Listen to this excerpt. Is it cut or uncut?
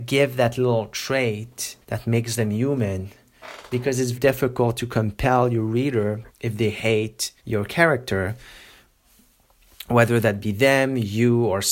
cut